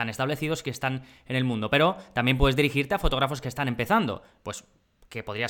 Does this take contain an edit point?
no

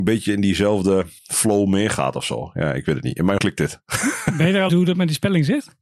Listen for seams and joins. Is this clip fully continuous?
no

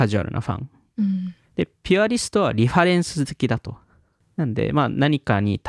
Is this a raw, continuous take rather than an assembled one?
no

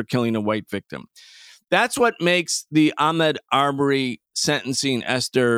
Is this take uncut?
yes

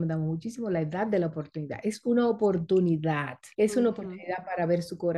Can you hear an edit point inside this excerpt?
yes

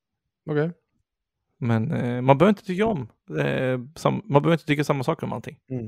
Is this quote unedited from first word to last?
yes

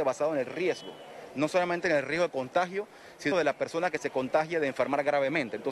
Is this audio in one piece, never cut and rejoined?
no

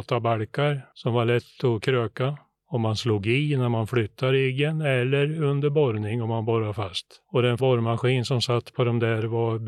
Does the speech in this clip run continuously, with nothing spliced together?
no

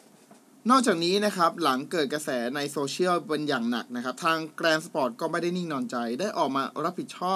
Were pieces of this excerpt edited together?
no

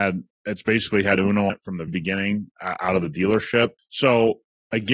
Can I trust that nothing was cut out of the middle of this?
no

